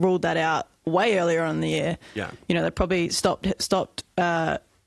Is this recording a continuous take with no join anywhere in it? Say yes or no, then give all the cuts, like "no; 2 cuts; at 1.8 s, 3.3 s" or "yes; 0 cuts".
yes; 0 cuts